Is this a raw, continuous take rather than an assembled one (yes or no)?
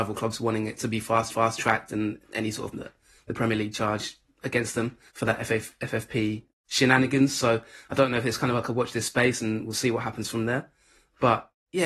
no